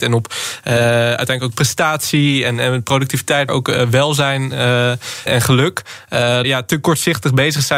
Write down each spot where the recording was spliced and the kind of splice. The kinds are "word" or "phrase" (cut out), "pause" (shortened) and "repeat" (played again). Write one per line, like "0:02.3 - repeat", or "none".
0:03.5 - word
0:05.3 - word
0:06.4 - phrase